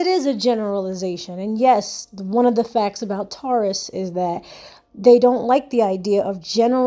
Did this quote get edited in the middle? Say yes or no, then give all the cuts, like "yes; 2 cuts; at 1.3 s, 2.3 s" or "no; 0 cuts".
no; 0 cuts